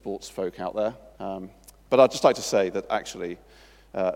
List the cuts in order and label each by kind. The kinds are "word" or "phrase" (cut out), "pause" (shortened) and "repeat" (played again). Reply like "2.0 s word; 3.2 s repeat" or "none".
1.1 s pause